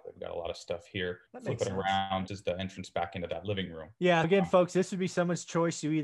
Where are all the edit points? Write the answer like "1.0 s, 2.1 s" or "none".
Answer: 1.3 s, 2.3 s, 4.2 s